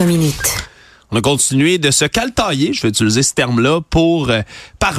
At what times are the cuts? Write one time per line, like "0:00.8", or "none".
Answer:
none